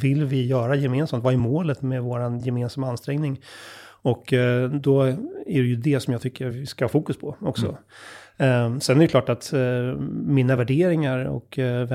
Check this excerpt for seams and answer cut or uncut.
uncut